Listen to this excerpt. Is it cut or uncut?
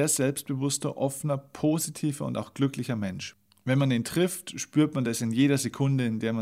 uncut